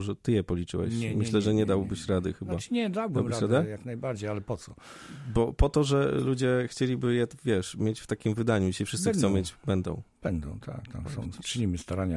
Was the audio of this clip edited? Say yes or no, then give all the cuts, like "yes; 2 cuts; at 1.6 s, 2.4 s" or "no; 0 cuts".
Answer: no; 0 cuts